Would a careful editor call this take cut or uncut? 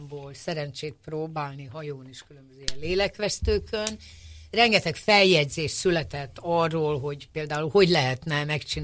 uncut